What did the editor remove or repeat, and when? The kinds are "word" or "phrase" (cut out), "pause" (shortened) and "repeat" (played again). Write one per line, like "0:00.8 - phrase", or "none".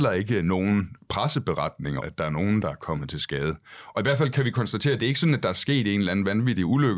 0:02.0 - word